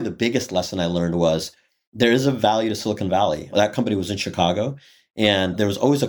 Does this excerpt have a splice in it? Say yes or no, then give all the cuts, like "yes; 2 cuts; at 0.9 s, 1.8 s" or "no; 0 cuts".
no; 0 cuts